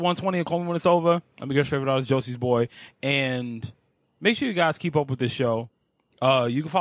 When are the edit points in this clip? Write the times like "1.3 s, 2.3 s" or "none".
none